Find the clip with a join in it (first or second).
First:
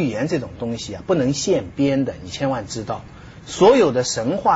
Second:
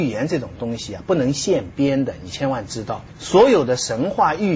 second